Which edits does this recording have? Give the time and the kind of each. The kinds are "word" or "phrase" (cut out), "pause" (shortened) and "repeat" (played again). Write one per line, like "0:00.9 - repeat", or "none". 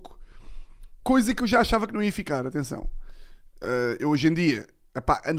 none